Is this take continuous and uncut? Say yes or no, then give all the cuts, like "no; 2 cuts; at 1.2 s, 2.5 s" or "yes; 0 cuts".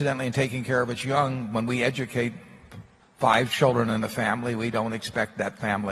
no; 1 cut; at 3.0 s